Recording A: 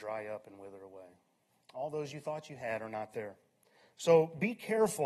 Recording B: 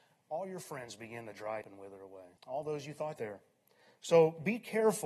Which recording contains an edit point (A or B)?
B